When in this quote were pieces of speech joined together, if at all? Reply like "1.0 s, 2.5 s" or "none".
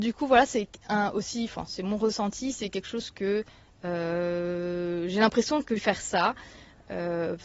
5.8 s